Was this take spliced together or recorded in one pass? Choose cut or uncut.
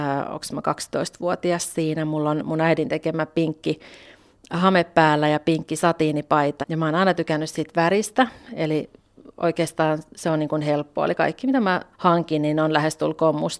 cut